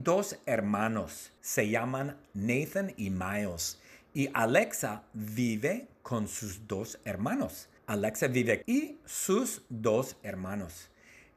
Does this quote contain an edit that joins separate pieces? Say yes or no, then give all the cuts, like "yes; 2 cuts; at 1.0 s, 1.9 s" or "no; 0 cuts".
yes; 3 cuts; at 1.4 s, 7.8 s, 8.6 s